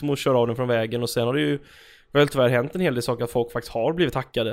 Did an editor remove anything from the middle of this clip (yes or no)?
no